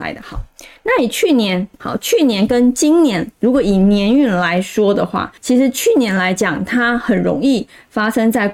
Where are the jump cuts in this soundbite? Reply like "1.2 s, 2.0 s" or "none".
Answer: 5.4 s

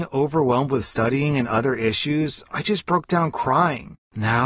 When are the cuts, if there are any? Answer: none

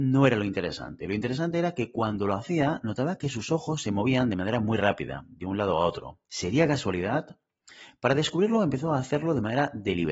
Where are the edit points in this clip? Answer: 6.3 s

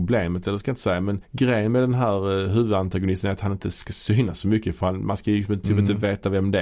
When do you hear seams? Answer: 1.2 s

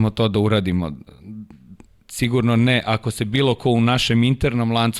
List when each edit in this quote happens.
none

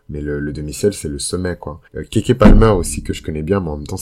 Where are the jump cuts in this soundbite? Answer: 1.9 s

